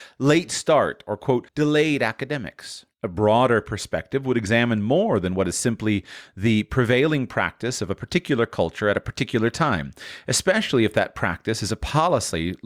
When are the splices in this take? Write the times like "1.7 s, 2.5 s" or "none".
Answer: 1.5 s, 2.9 s

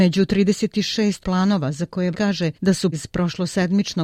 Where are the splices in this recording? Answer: 1.2 s, 2.1 s, 2.5 s, 2.9 s

